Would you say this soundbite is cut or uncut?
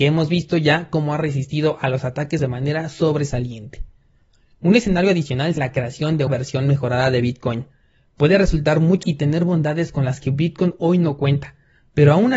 cut